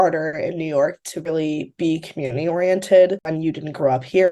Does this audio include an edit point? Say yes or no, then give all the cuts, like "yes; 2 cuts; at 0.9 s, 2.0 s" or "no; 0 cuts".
yes; 1 cut; at 3.2 s